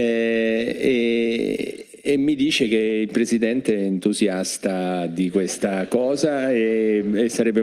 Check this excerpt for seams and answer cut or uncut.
uncut